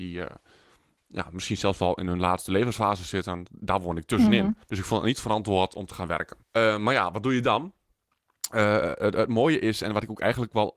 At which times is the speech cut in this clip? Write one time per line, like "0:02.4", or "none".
0:04.6
0:06.4